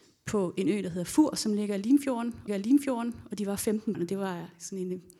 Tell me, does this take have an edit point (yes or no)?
yes